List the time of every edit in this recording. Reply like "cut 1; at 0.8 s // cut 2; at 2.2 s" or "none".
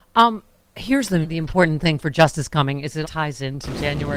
cut 1; at 1.2 s // cut 2; at 3.0 s